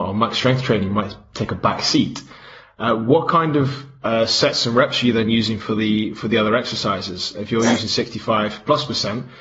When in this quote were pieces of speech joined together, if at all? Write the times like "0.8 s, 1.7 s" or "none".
none